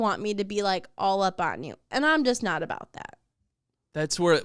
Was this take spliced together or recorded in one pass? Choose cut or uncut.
uncut